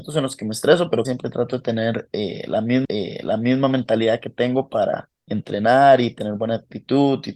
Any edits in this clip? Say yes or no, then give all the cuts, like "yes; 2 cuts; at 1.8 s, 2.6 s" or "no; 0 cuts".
yes; 3 cuts; at 1.0 s, 2.8 s, 5.2 s